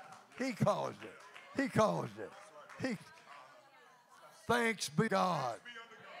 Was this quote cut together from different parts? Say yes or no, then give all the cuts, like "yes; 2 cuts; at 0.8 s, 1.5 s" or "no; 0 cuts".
yes; 2 cuts; at 3.0 s, 5.1 s